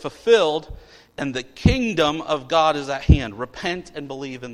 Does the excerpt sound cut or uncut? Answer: uncut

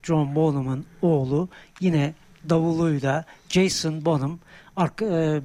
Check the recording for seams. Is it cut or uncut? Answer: uncut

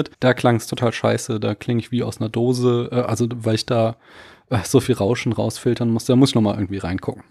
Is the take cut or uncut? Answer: uncut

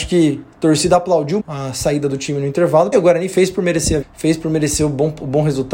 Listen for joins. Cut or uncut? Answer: cut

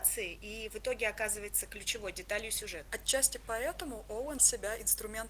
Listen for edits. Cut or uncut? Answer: cut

